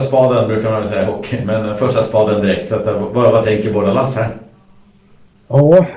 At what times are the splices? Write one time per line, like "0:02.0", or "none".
none